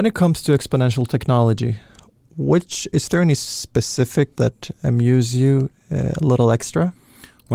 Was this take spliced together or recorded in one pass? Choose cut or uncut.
cut